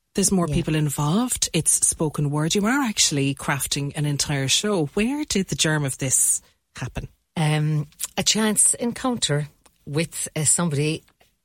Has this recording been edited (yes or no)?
yes